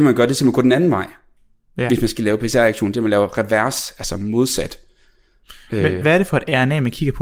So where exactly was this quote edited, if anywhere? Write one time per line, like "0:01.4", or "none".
0:06.0